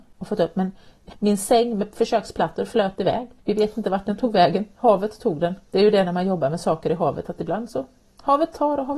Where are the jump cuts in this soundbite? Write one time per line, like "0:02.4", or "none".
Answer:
0:03.4
0:05.6